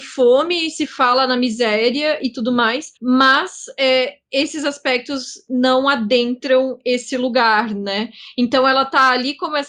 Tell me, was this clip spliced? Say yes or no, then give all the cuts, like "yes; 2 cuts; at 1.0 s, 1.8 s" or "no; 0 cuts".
yes; 1 cut; at 3.0 s